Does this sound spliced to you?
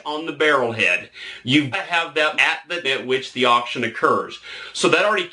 yes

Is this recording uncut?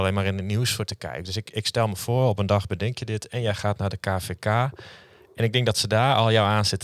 yes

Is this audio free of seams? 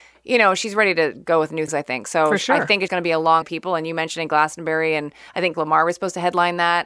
no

